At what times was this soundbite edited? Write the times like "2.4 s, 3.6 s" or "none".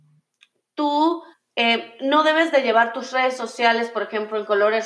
1.3 s